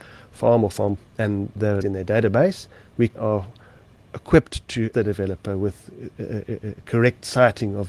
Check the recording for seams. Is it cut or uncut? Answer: cut